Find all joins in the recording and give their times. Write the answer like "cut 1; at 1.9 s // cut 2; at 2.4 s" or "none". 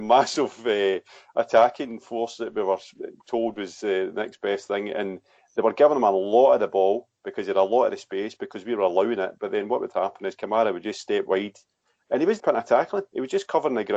cut 1; at 12.4 s